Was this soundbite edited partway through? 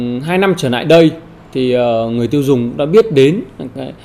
no; 0 cuts

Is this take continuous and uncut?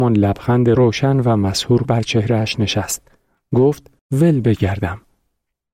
no; 2 cuts; at 1.8 s, 4.0 s

